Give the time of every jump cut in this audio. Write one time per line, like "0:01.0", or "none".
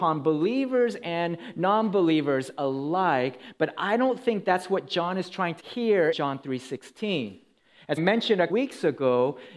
0:05.6
0:06.1
0:08.0
0:08.5